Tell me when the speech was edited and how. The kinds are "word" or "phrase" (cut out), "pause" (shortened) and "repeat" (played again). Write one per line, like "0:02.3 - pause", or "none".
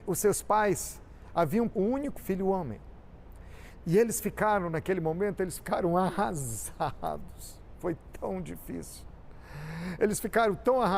0:01.7 - word
0:02.2 - word